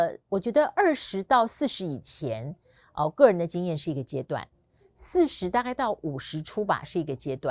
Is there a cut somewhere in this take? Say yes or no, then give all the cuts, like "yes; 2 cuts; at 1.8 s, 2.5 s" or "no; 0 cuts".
no; 0 cuts